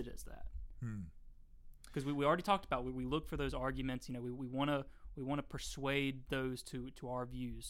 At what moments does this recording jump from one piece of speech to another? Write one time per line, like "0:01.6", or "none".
none